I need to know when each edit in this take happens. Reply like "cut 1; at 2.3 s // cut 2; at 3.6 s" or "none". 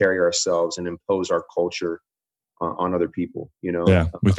none